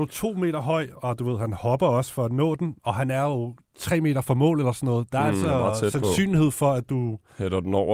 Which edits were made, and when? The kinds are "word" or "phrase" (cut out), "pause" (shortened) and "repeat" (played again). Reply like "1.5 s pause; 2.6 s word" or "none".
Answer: 2.8 s pause